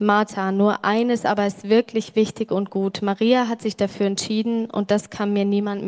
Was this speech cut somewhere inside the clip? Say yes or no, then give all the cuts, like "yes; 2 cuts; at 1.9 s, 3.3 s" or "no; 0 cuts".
no; 0 cuts